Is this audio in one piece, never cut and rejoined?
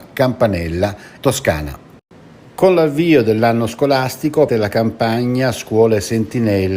no; 2 cuts; at 1.2 s, 4.5 s

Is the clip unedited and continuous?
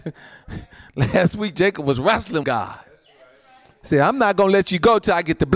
no; 1 cut; at 2.4 s

